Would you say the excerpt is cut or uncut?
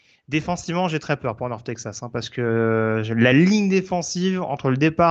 uncut